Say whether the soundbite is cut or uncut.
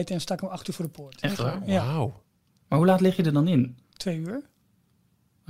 cut